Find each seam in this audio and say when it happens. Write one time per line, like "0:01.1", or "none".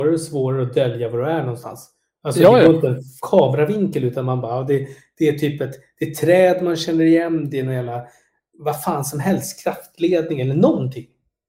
none